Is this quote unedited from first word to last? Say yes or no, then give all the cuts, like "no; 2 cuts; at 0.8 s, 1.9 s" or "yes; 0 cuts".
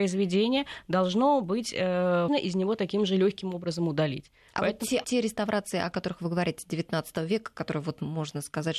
no; 2 cuts; at 2.3 s, 5.0 s